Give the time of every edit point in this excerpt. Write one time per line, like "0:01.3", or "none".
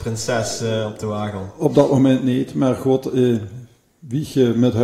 0:03.9